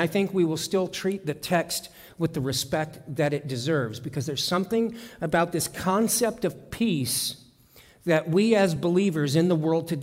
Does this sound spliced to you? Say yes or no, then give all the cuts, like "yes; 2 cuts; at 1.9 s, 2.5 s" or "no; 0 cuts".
no; 0 cuts